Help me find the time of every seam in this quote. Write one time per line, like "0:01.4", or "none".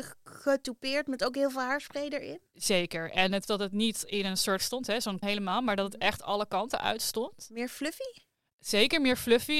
0:03.5
0:04.6
0:05.2